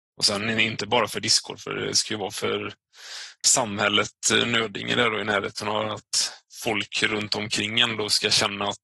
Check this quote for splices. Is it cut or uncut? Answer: uncut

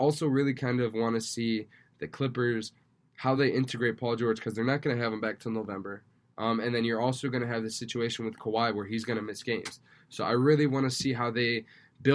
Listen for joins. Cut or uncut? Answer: uncut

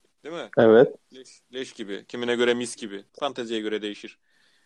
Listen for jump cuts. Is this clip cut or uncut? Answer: cut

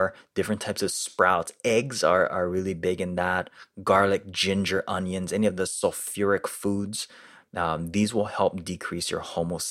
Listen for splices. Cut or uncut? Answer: uncut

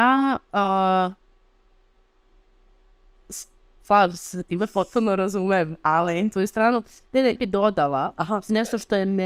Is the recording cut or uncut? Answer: cut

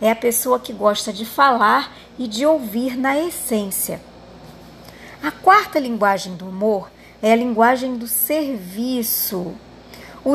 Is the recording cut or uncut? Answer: uncut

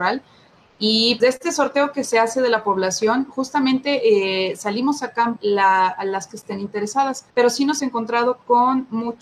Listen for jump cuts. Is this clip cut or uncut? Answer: cut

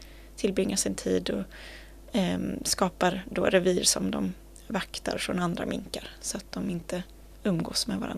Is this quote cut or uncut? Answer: uncut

